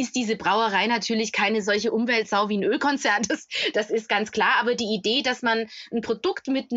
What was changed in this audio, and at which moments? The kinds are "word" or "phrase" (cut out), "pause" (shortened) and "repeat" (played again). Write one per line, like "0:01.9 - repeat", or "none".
none